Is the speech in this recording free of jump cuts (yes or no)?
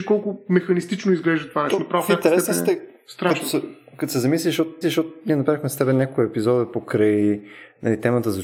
no